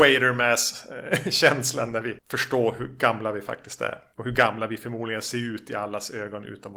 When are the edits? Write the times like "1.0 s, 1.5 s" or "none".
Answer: none

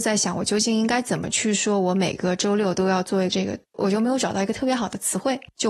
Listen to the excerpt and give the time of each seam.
3.3 s, 3.6 s

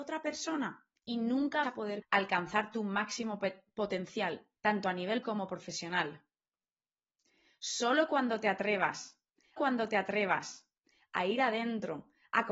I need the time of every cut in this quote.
1.0 s, 1.6 s, 2.0 s, 4.6 s, 5.2 s, 9.6 s

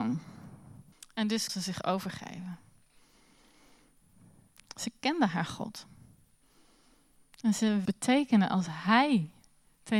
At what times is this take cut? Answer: 0.9 s, 1.5 s, 7.9 s

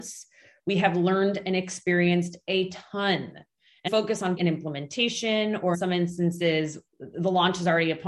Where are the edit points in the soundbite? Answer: 3.9 s, 4.4 s, 5.7 s, 6.9 s

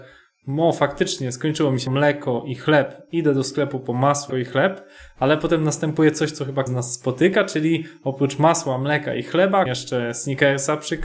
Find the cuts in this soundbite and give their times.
1.9 s, 4.3 s, 6.7 s, 9.7 s

